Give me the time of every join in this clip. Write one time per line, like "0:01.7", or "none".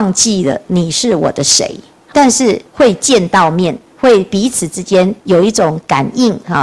0:02.1
0:02.7
0:03.9
0:05.2